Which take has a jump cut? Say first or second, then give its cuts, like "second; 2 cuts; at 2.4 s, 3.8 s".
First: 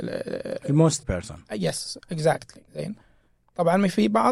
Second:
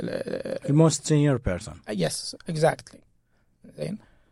first; 2 cuts; at 1.0 s, 2.7 s